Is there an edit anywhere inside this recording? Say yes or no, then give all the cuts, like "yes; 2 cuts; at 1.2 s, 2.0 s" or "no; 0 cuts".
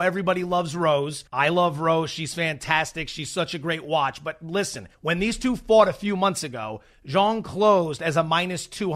yes; 2 cuts; at 1.3 s, 4.9 s